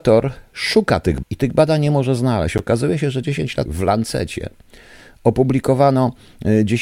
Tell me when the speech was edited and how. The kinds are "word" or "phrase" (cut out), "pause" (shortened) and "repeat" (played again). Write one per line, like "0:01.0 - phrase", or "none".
0:01.2 - word
0:03.7 - word